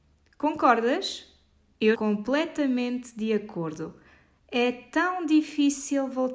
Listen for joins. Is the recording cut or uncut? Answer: cut